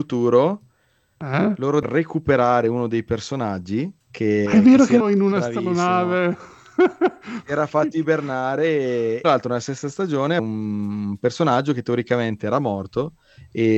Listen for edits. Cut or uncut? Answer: cut